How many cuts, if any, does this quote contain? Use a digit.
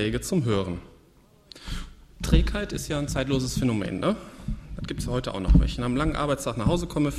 0